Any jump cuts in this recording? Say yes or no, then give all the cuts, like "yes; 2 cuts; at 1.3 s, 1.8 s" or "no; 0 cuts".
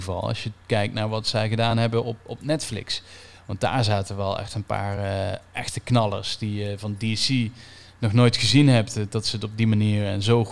no; 0 cuts